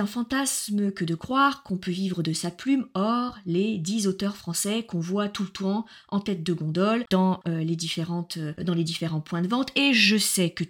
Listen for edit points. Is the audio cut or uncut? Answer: cut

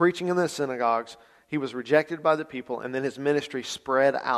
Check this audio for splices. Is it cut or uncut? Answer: uncut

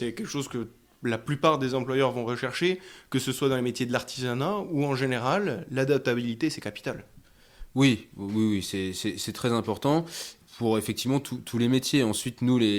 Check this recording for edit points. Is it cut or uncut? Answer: uncut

